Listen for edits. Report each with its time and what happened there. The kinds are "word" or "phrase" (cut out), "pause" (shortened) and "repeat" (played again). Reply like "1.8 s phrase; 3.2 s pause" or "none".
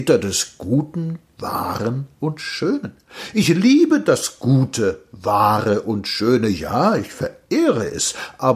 none